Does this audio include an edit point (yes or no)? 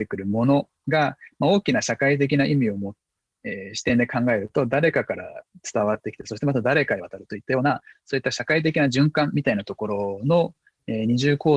no